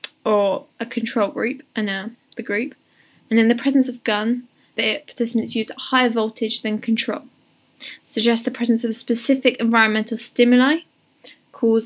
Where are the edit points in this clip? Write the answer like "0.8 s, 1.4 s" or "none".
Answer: 4.7 s